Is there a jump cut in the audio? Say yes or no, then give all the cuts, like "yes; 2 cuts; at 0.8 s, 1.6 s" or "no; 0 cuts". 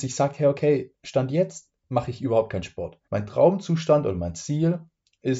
yes; 2 cuts; at 1.8 s, 3.0 s